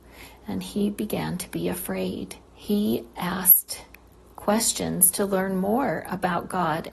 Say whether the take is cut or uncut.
cut